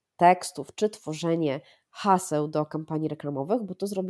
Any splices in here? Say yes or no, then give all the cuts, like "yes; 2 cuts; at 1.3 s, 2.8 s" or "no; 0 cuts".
no; 0 cuts